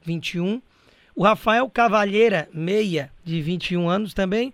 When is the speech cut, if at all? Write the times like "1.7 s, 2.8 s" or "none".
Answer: 3.2 s

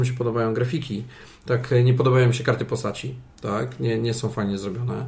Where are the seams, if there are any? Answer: 3.3 s

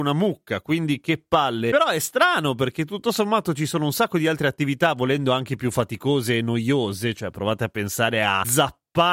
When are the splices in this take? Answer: none

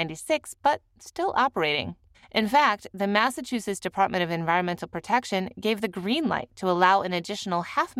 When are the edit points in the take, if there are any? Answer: 2.1 s

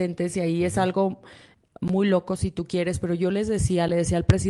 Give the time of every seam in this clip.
none

